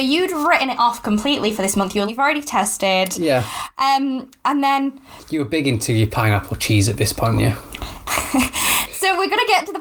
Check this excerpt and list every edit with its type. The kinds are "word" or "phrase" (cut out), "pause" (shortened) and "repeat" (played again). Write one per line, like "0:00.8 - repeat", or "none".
0:02.1 - word
0:07.4 - word

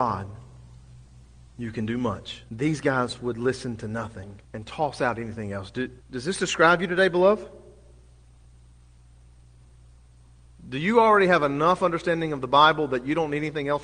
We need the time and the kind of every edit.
0:02.5 - pause
0:04.4 - pause
0:06.0 - pause

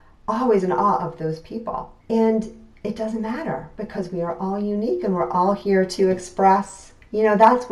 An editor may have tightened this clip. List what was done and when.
0:02.0 - pause

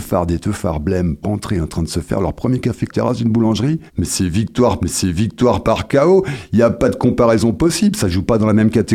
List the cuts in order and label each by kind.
0:01.2 - word
0:02.9 - phrase
0:03.9 - pause
0:04.8 - repeat

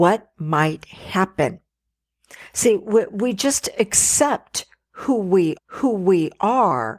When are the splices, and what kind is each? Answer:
0:05.6 - repeat

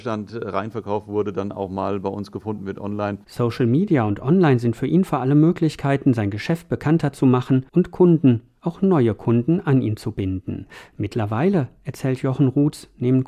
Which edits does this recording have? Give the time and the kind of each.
0:07.7 - pause

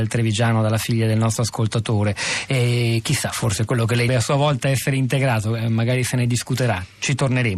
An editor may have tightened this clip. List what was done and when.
0:04.1 - phrase

